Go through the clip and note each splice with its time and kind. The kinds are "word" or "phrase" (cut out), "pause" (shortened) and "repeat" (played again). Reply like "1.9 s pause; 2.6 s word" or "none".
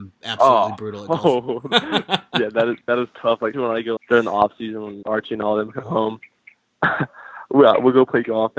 3.5 s word; 4.0 s word; 5.0 s word